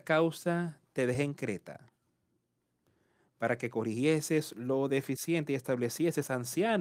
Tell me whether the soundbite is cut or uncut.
uncut